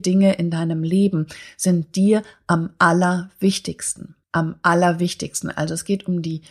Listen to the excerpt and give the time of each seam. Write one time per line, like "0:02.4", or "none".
0:04.2

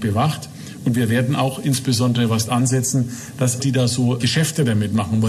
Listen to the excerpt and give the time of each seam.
0:02.5
0:03.6
0:04.2

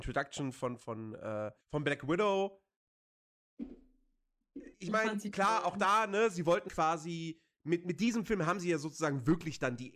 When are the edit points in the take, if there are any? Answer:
0:01.6
0:04.7
0:06.7

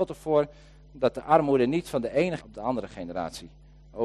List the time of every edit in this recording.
0:02.4

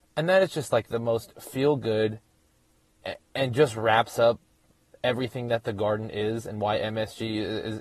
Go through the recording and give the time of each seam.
none

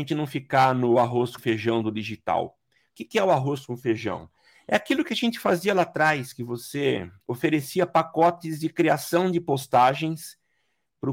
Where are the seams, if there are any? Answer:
0:01.4

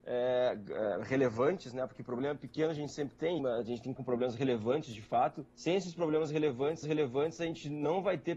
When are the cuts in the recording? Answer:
0:03.4
0:04.0
0:05.5
0:06.8

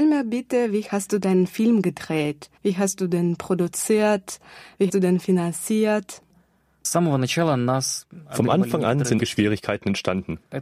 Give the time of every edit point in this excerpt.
0:02.6
0:04.9
0:09.2

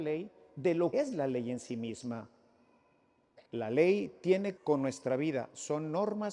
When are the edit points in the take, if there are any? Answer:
0:00.9
0:03.5
0:04.6

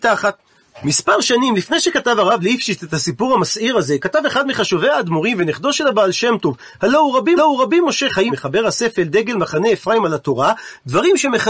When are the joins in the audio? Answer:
0:07.4
0:08.3

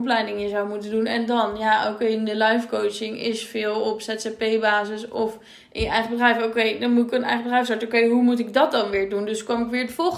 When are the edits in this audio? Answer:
none

